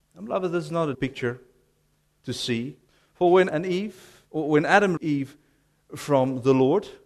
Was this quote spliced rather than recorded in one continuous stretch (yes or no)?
yes